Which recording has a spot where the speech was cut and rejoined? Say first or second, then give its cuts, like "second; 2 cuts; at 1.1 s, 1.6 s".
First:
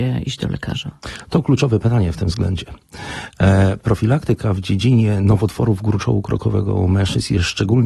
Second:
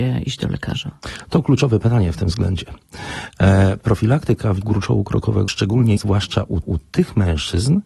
second; 4 cuts; at 4.6 s, 5.5 s, 6.0 s, 6.6 s